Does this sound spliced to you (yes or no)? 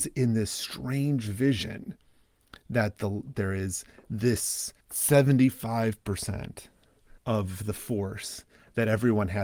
yes